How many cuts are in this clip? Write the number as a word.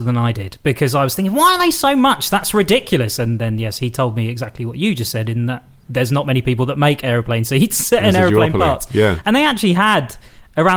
one